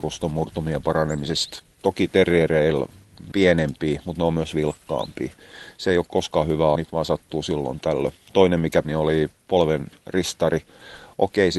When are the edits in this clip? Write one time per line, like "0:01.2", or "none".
0:03.3
0:06.1
0:06.7
0:08.8